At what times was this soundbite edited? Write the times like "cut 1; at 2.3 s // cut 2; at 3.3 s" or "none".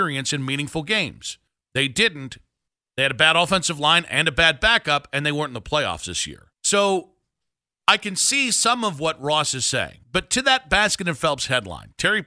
cut 1; at 1.5 s // cut 2; at 2.7 s // cut 3; at 6.5 s // cut 4; at 10.0 s